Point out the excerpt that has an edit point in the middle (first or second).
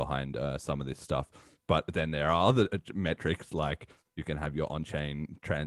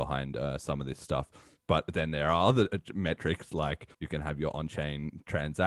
second